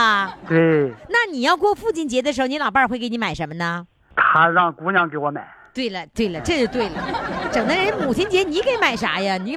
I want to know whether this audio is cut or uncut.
uncut